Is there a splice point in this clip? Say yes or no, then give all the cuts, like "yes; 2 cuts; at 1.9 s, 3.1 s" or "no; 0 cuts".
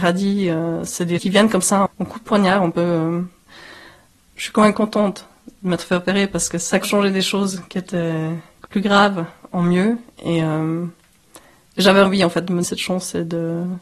yes; 6 cuts; at 1.2 s, 1.9 s, 6.8 s, 8.7 s, 12.1 s, 12.6 s